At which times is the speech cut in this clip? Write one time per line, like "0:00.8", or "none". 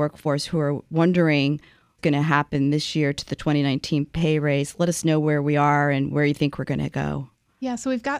0:02.0